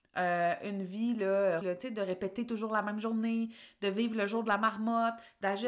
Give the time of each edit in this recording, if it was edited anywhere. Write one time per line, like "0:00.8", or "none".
0:01.6

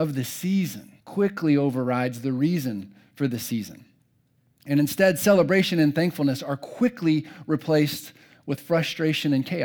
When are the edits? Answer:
0:01.0

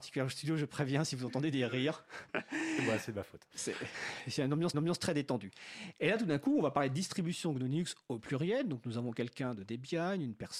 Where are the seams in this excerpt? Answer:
0:04.7

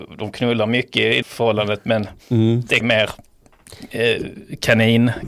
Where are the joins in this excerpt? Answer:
0:01.2
0:02.8

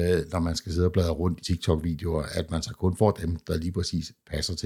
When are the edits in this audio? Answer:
0:01.4

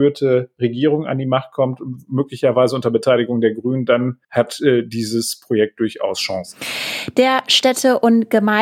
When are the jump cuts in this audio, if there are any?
0:04.2

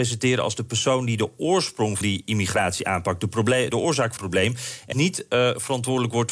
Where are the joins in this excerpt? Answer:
0:02.0
0:03.7
0:04.2
0:04.9

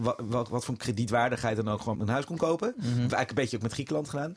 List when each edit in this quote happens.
0:01.9

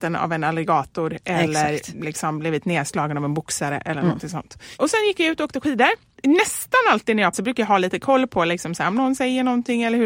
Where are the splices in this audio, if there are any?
0:07.3

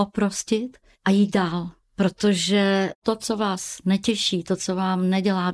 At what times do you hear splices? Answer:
0:00.9

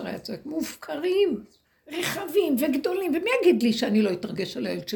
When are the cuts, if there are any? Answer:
0:01.6

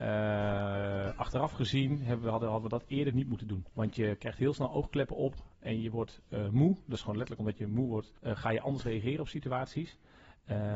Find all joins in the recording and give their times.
0:03.7
0:08.2

